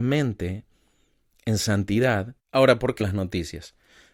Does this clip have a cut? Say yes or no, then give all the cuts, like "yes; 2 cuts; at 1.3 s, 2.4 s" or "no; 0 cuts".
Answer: yes; 2 cuts; at 2.4 s, 3.0 s